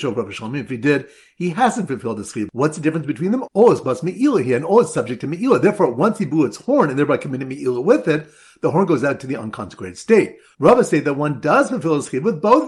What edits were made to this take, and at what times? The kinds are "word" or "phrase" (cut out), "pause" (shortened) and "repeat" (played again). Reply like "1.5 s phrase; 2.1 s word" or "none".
none